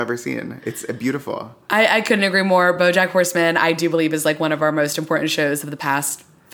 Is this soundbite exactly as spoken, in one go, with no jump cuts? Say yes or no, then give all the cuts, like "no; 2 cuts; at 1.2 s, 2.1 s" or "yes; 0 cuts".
yes; 0 cuts